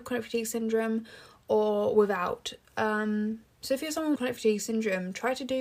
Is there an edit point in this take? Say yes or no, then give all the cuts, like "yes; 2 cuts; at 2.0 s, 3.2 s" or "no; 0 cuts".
yes; 1 cut; at 4.2 s